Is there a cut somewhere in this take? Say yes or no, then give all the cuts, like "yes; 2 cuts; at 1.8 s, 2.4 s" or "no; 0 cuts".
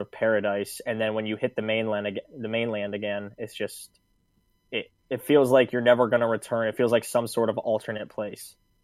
yes; 1 cut; at 5.0 s